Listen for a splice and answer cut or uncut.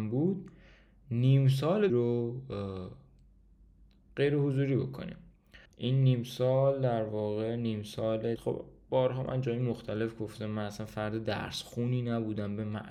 cut